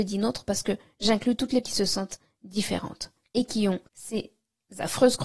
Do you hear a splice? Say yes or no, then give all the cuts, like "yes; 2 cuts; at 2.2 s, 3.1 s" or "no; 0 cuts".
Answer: yes; 3 cuts; at 1.6 s, 3.2 s, 3.9 s